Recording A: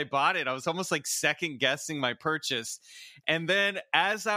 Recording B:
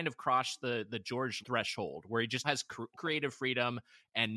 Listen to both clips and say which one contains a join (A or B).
B